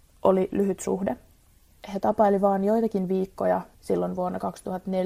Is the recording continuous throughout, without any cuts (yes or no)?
no